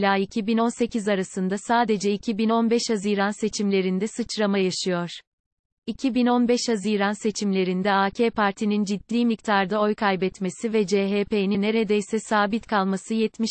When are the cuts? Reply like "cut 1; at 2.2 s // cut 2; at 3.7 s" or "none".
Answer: cut 1; at 11.5 s

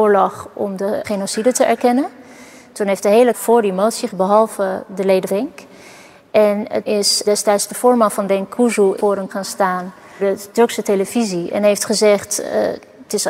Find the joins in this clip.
cut 1; at 1.0 s // cut 2; at 3.3 s // cut 3; at 4.1 s // cut 4; at 5.3 s // cut 5; at 6.9 s // cut 6; at 7.2 s // cut 7; at 9.0 s // cut 8; at 9.3 s // cut 9; at 10.2 s

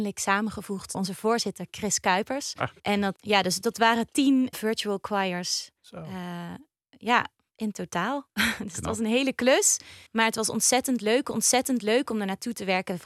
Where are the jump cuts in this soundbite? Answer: cut 1; at 0.9 s // cut 2; at 2.8 s // cut 3; at 3.2 s // cut 4; at 4.5 s // cut 5; at 5.8 s // cut 6; at 10.1 s // cut 7; at 11.3 s

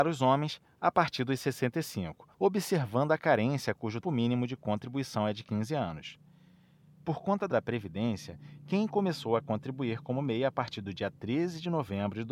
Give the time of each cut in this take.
cut 1; at 2.3 s // cut 2; at 4.0 s // cut 3; at 7.5 s

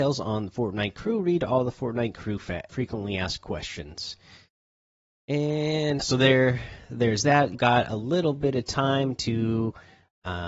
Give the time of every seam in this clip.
cut 1; at 2.7 s // cut 2; at 6.0 s // cut 3; at 7.5 s

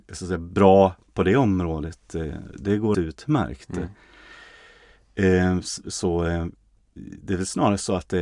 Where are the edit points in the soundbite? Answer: cut 1; at 1.1 s // cut 2; at 2.9 s

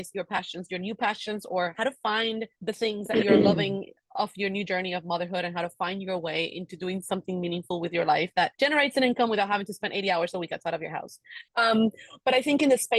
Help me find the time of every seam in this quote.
cut 1; at 2.6 s // cut 2; at 8.5 s // cut 3; at 11.5 s

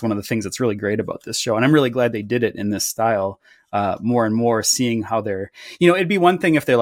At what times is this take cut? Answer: none

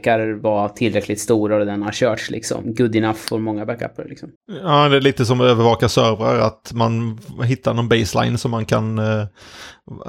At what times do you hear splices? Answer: cut 1; at 4.4 s

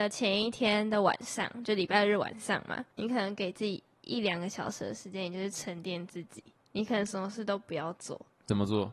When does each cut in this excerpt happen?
cut 1; at 2.9 s // cut 2; at 6.6 s

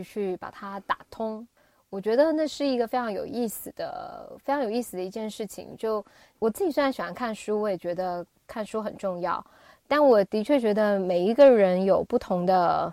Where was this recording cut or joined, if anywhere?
none

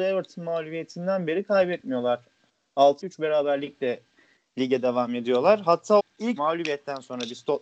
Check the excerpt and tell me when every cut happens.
cut 1; at 3.0 s // cut 2; at 6.0 s // cut 3; at 6.4 s

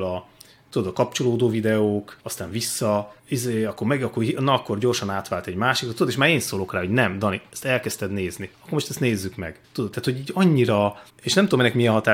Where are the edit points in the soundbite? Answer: cut 1; at 2.2 s // cut 2; at 3.2 s // cut 3; at 8.5 s // cut 4; at 9.6 s // cut 5; at 11.1 s

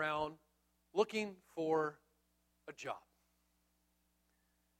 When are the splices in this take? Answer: none

